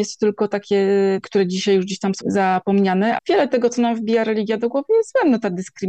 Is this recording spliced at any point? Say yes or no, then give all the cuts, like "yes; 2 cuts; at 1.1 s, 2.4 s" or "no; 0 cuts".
yes; 3 cuts; at 1.2 s, 2.2 s, 3.2 s